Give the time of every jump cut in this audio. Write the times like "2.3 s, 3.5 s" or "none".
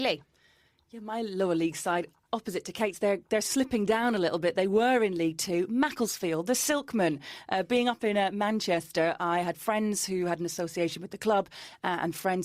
none